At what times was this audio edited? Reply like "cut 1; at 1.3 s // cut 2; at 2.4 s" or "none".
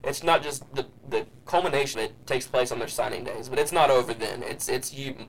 cut 1; at 1.0 s // cut 2; at 1.9 s